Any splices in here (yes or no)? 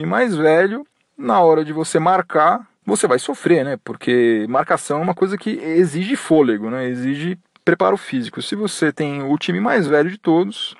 no